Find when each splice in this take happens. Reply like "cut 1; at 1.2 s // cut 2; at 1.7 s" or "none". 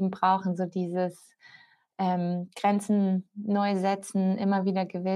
none